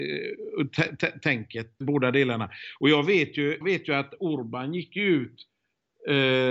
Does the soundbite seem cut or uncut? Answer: cut